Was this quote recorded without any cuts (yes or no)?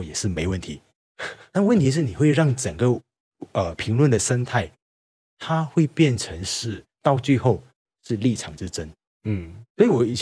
yes